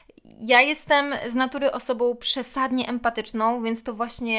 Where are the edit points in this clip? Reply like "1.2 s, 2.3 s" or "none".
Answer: none